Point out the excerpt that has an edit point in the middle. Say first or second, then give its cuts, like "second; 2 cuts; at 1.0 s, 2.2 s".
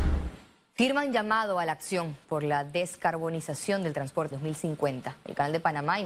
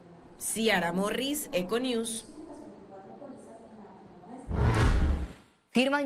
first; 1 cut; at 4.3 s